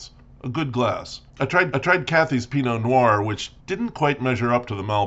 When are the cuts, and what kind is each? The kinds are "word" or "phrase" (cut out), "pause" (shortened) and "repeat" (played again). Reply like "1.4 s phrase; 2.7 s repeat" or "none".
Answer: 1.3 s pause; 1.7 s repeat; 3.6 s pause